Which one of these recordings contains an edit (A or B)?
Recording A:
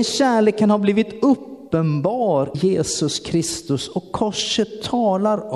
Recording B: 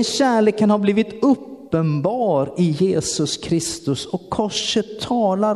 A